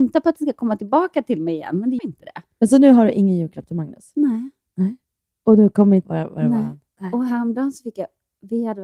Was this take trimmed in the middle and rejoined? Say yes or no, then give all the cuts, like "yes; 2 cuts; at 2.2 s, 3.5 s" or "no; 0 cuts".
yes; 2 cuts; at 2.0 s, 6.0 s